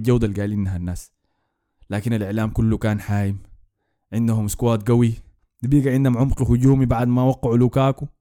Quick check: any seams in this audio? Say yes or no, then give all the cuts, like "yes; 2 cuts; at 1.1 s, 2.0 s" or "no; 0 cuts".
no; 0 cuts